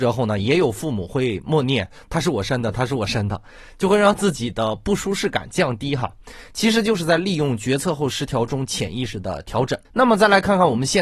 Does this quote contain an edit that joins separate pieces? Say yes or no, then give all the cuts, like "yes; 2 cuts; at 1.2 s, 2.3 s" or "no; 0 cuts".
yes; 1 cut; at 9.8 s